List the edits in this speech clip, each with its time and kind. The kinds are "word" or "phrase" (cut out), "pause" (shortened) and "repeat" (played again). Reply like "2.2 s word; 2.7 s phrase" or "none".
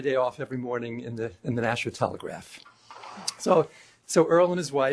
none